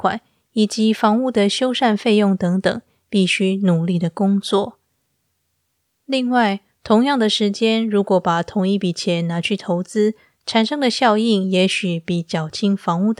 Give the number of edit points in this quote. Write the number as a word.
zero